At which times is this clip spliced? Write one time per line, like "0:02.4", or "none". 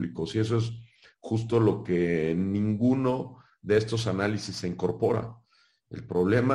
none